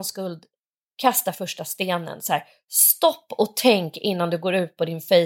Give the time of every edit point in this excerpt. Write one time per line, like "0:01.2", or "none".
none